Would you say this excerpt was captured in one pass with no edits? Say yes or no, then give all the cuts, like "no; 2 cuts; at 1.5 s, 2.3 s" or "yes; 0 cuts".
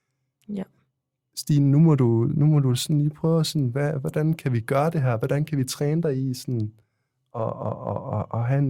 yes; 0 cuts